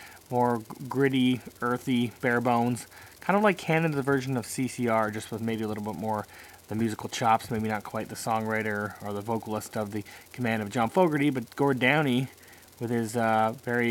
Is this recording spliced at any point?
no; 0 cuts

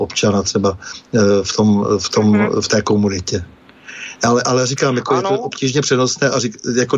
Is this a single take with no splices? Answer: yes; 0 cuts

